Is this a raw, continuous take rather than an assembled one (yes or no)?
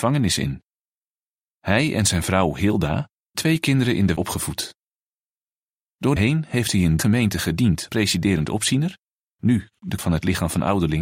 no